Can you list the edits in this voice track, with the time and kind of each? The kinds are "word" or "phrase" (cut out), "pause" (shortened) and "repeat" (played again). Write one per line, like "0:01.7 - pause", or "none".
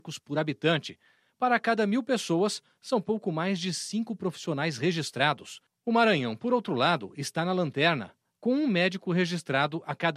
none